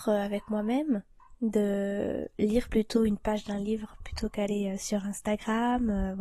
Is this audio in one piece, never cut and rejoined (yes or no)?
yes